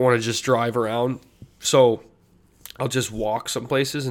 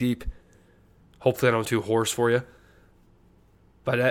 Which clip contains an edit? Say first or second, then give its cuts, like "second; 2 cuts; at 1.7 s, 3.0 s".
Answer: second; 1 cut; at 1.6 s